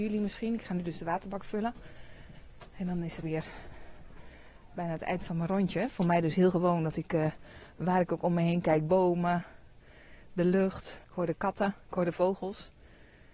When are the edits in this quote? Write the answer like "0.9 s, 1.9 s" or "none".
3.2 s, 11.0 s